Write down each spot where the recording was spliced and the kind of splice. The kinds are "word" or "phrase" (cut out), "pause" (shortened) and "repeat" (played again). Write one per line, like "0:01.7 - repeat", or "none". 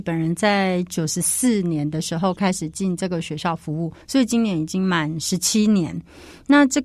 0:04.0 - pause